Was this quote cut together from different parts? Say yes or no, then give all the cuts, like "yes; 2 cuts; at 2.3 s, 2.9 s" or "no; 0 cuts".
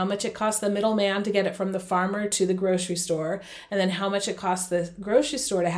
no; 0 cuts